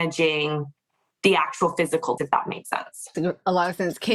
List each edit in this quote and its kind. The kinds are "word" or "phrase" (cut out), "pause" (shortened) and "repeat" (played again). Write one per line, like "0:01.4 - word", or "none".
0:02.2 - word
0:03.1 - phrase